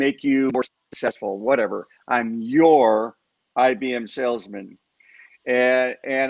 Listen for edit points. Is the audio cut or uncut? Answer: uncut